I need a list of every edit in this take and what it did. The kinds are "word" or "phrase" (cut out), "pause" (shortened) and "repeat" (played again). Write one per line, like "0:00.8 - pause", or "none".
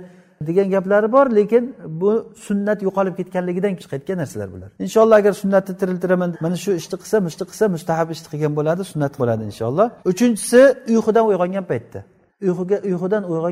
0:03.8 - word
0:04.7 - pause
0:06.3 - word
0:07.3 - repeat
0:09.2 - word
0:10.0 - pause
0:12.3 - pause